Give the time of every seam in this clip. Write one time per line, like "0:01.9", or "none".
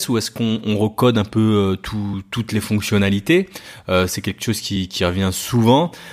none